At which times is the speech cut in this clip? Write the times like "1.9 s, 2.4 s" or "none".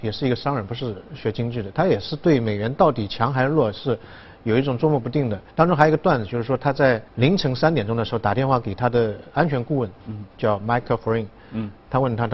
5.5 s, 7.1 s, 10.3 s